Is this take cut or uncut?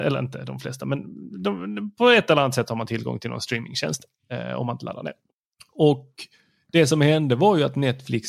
uncut